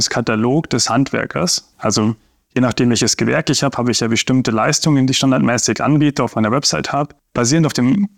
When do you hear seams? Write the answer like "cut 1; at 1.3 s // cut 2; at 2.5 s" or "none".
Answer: cut 1; at 1.7 s